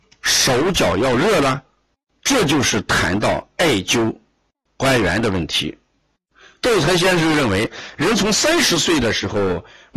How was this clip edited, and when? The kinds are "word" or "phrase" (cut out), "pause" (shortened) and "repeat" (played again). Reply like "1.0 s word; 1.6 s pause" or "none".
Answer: none